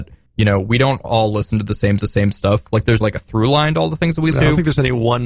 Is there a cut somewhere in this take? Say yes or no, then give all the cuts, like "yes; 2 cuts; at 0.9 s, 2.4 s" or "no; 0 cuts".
yes; 3 cuts; at 2.0 s, 3.0 s, 4.3 s